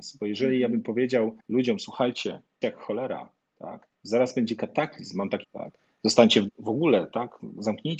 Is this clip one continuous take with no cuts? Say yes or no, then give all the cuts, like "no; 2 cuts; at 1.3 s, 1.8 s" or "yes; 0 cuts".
no; 5 cuts; at 1.4 s, 2.6 s, 3.9 s, 5.4 s, 6.5 s